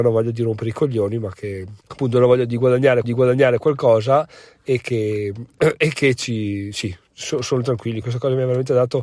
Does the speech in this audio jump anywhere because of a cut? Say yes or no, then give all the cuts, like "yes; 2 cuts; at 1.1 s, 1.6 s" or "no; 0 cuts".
yes; 3 cuts; at 1.8 s, 3.0 s, 8.0 s